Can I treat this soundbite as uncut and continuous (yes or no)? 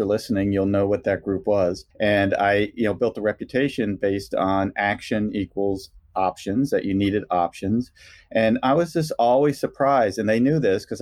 no